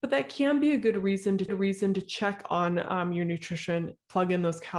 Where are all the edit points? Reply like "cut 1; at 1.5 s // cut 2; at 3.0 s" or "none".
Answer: cut 1; at 1.5 s